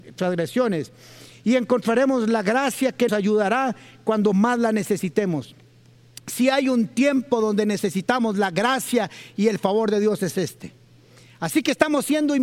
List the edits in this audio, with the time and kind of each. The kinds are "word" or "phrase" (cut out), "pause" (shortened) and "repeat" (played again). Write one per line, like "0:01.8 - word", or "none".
0:03.1 - word